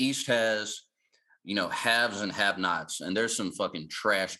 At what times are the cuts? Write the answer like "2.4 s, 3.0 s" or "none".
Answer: none